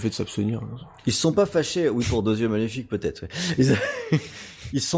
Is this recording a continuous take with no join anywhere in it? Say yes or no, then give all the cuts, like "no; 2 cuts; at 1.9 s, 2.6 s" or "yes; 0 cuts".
yes; 0 cuts